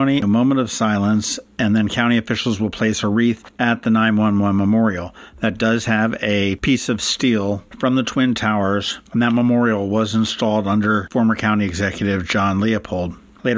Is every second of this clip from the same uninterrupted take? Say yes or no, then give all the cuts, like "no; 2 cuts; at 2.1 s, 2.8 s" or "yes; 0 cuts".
yes; 0 cuts